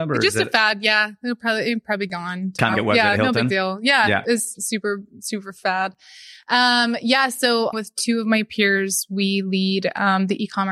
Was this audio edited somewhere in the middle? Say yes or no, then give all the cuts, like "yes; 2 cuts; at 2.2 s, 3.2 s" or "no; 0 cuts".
yes; 2 cuts; at 2.7 s, 7.7 s